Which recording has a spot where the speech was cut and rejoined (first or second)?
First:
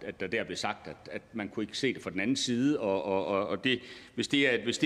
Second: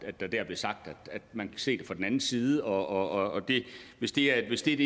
second